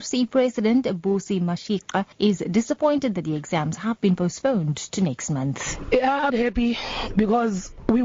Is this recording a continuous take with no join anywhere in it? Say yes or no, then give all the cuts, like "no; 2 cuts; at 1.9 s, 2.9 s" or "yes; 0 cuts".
no; 2 cuts; at 2.1 s, 6.3 s